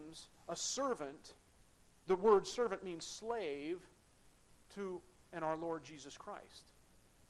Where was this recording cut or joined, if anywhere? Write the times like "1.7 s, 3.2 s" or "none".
2.0 s, 5.2 s